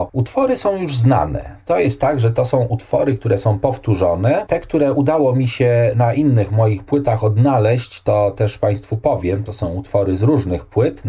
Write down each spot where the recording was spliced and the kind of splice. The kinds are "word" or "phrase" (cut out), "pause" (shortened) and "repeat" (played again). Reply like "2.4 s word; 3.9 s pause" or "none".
none